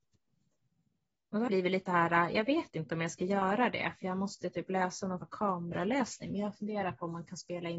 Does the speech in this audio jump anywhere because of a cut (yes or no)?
yes